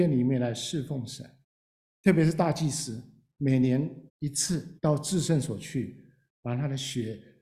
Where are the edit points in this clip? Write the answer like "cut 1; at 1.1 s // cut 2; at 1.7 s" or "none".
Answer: cut 1; at 1.4 s // cut 2; at 4.1 s // cut 3; at 4.8 s